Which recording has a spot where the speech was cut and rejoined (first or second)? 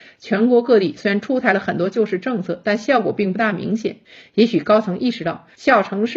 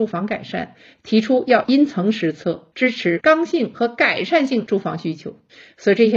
second